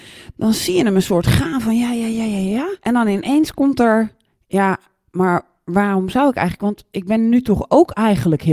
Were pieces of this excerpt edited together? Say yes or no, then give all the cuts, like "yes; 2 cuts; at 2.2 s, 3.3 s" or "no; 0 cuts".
yes; 2 cuts; at 2.8 s, 4.3 s